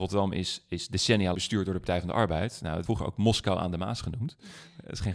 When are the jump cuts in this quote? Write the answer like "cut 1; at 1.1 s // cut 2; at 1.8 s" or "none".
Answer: cut 1; at 1.3 s // cut 2; at 2.9 s